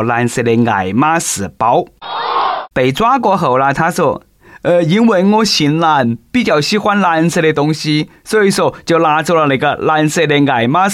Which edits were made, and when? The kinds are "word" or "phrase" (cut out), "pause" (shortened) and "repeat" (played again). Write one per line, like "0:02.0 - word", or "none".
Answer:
0:02.7 - pause

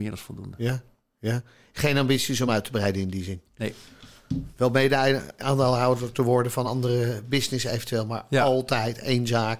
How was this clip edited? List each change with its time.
none

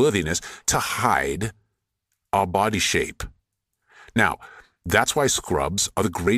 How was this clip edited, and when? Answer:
none

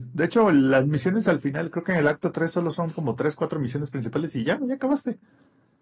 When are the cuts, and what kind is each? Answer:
none

